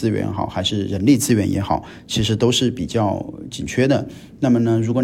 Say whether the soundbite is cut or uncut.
uncut